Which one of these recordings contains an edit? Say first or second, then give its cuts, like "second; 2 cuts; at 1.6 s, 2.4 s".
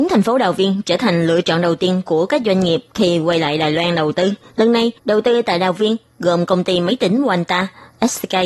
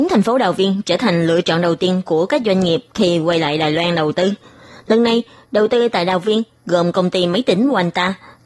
first; 2 cuts; at 4.5 s, 5.0 s